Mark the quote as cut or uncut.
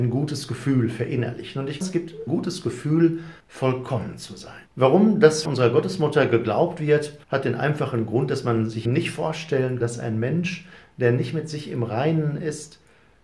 cut